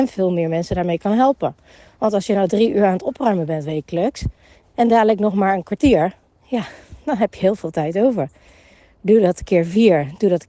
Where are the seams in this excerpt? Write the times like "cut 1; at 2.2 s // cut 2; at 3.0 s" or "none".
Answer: none

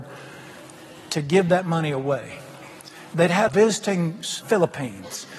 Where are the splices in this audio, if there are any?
cut 1; at 3.5 s // cut 2; at 4.4 s

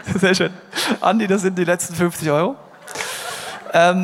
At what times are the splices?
none

